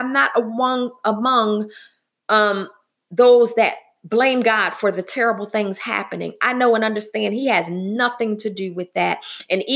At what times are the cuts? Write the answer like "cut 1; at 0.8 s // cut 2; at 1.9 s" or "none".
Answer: none